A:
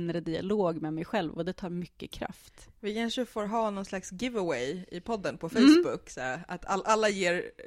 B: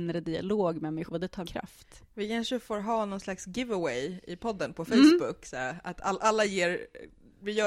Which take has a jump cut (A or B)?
B